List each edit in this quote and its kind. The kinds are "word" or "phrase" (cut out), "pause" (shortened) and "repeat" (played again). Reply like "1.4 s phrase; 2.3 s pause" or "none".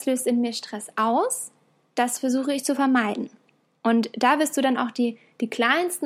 none